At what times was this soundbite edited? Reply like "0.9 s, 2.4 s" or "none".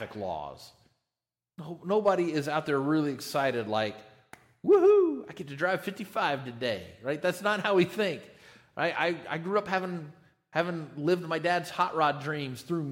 none